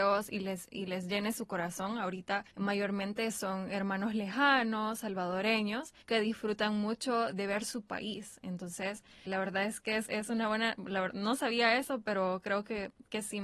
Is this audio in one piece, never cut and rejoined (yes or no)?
no